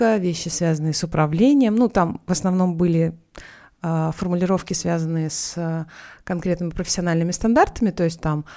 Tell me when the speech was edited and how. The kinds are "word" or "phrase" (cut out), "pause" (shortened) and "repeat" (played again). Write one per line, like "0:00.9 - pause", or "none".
none